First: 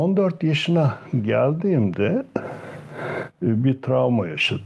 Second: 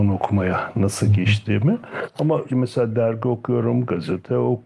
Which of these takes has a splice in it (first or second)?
second